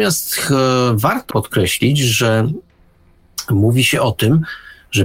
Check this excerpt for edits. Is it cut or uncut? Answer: cut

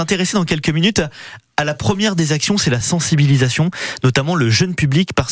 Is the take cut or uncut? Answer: uncut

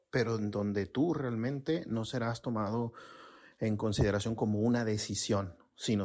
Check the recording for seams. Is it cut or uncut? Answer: uncut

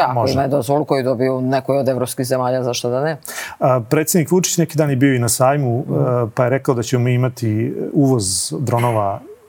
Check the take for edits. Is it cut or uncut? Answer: uncut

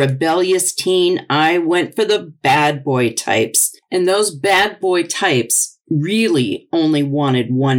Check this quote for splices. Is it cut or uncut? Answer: uncut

